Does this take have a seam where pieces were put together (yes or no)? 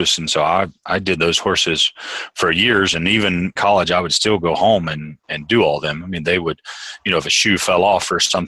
yes